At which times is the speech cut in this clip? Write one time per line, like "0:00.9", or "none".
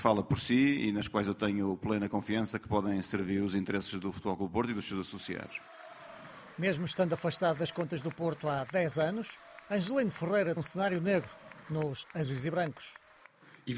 0:10.6